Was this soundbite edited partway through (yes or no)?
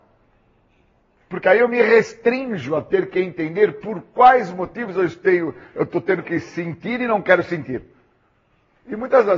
no